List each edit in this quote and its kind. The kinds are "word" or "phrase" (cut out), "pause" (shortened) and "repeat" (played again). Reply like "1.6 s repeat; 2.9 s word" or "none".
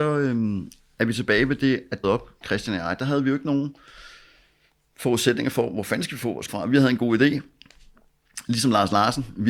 2.0 s phrase; 6.5 s word